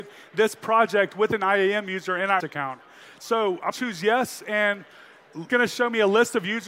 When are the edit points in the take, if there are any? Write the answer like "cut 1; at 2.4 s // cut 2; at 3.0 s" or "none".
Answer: cut 1; at 2.4 s // cut 2; at 3.7 s // cut 3; at 5.5 s